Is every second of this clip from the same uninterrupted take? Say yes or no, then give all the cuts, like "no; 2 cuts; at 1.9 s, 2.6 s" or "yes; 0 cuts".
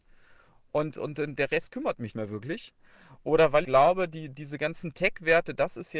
no; 2 cuts; at 2.1 s, 3.6 s